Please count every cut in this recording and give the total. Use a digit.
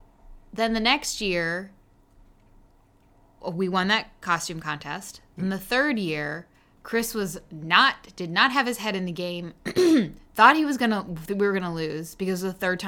0